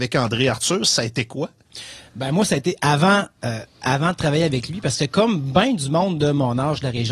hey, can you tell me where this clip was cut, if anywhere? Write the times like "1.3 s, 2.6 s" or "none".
none